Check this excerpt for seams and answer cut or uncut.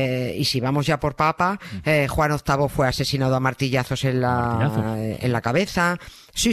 cut